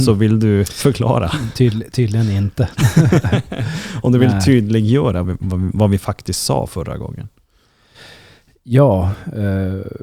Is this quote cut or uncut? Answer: cut